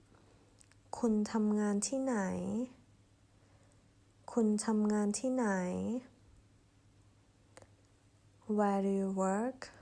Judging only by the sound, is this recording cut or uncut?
uncut